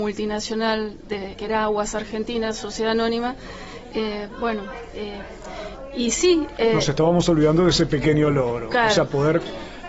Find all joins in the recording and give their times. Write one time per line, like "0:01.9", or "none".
0:01.3